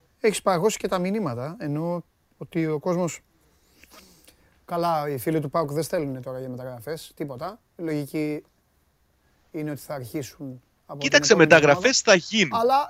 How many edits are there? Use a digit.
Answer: 0